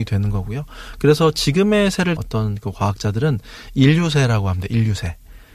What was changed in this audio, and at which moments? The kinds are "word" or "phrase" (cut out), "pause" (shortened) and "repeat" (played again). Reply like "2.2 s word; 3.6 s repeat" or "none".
2.2 s word